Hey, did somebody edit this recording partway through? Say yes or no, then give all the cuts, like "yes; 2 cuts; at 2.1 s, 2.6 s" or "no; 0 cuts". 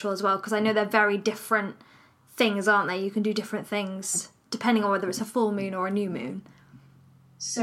no; 0 cuts